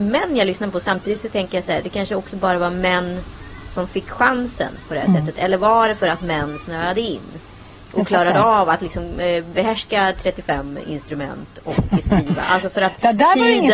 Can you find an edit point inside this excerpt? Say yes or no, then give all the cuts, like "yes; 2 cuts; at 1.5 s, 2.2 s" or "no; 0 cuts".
no; 0 cuts